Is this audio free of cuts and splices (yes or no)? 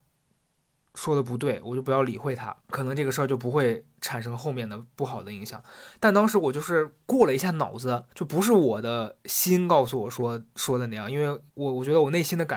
no